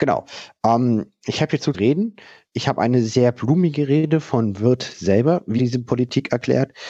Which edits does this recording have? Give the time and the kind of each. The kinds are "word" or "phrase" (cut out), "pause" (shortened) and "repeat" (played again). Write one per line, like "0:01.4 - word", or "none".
0:01.7 - word
0:05.6 - word